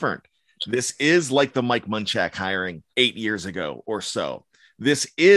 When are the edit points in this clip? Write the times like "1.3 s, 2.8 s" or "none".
2.9 s